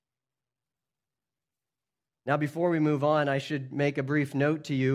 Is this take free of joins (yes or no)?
yes